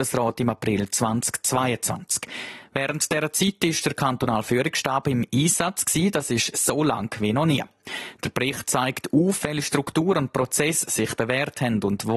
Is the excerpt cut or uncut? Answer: uncut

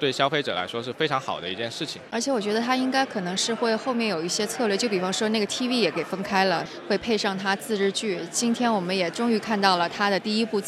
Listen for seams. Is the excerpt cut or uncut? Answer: uncut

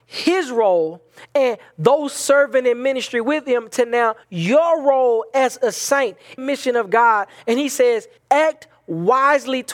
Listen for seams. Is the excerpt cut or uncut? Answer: cut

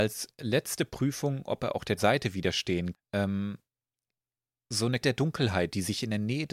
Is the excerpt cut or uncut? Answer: cut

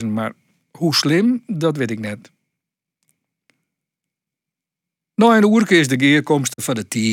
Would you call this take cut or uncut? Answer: uncut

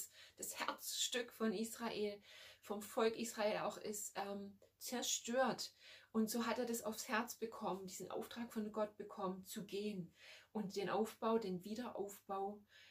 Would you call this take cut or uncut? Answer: uncut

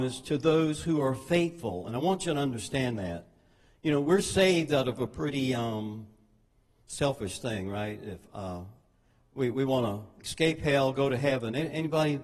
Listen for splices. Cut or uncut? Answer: uncut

